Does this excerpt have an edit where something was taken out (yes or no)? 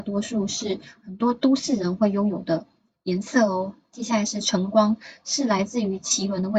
no